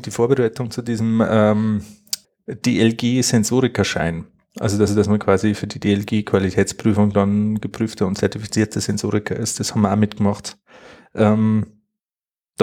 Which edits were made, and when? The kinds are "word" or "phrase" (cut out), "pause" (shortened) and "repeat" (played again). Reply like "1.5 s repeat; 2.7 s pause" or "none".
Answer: 2.2 s pause; 4.9 s repeat